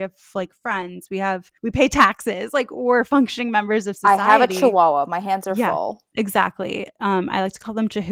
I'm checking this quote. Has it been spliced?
yes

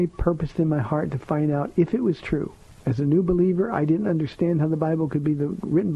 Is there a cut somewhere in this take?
no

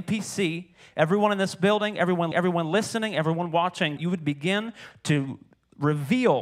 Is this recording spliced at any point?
yes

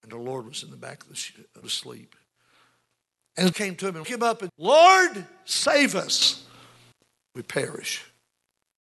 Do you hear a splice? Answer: yes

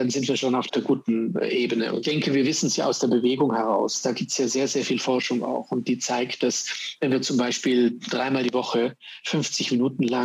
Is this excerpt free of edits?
no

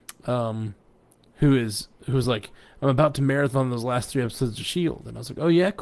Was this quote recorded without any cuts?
yes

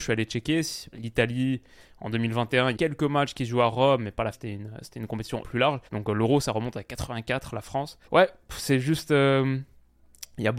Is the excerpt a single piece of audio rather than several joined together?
no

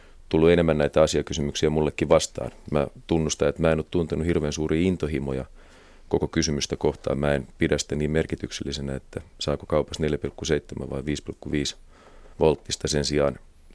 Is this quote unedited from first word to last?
no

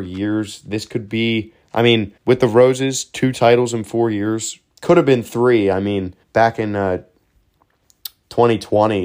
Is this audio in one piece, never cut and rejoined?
no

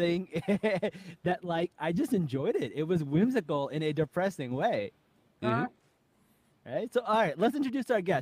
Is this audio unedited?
yes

